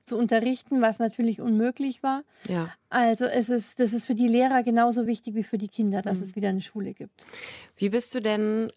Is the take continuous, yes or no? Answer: yes